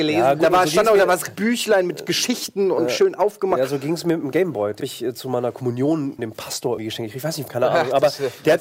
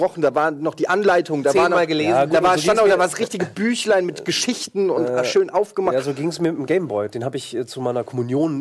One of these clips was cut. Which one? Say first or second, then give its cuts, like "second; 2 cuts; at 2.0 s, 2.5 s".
first; 6 cuts; at 1.3 s, 2.9 s, 4.8 s, 6.2 s, 6.8 s, 7.5 s